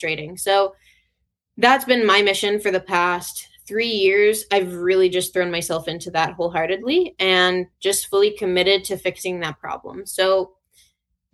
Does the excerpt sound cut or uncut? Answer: uncut